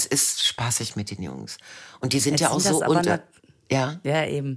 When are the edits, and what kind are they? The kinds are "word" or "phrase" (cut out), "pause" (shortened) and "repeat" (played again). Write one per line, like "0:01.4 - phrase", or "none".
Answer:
none